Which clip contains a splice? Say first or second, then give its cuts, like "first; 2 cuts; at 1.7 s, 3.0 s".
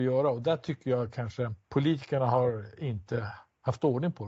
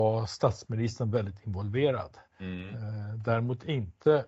second; 1 cut; at 2.3 s